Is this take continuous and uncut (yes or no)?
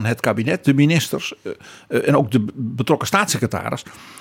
yes